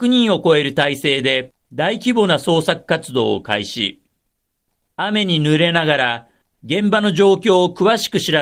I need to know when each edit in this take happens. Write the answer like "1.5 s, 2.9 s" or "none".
none